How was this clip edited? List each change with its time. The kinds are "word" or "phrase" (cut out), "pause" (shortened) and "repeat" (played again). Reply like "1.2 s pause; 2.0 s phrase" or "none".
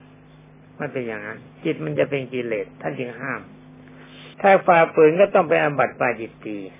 4.3 s pause